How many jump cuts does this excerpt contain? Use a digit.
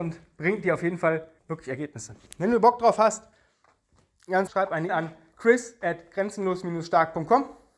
3